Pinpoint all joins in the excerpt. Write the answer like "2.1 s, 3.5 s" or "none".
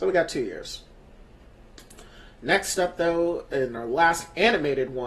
none